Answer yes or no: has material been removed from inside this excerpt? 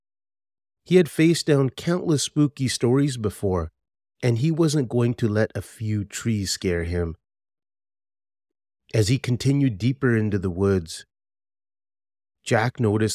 yes